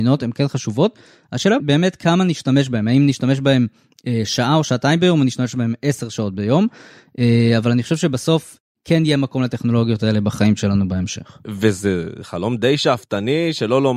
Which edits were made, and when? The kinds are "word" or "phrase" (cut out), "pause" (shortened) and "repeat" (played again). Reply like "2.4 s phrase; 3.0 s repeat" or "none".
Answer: 1.6 s word